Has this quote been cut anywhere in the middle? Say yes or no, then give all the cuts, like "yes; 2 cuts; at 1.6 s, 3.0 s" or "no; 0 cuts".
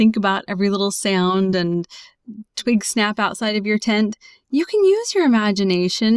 no; 0 cuts